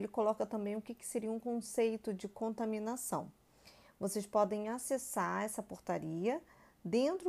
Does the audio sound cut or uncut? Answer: uncut